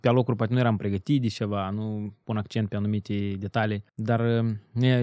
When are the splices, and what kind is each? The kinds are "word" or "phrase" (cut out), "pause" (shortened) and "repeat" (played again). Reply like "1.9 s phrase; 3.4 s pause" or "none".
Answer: 2.2 s phrase; 3.9 s pause

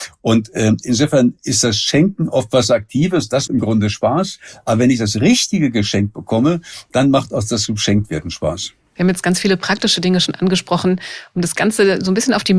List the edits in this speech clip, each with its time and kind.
3.5 s word

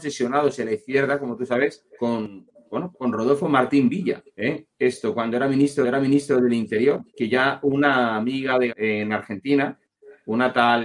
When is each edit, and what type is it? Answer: 1.9 s pause; 2.9 s word; 4.3 s pause; 5.8 s repeat; 7.1 s pause; 8.7 s word

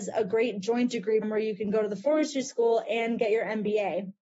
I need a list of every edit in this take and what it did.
1.2 s word

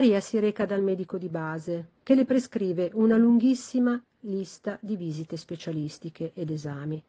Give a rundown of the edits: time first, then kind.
2.0 s pause

